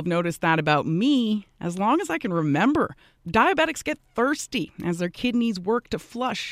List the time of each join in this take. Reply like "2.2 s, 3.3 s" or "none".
none